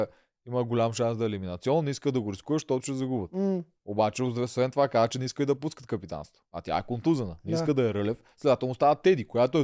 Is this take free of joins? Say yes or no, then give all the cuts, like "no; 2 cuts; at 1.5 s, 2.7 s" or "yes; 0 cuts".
yes; 0 cuts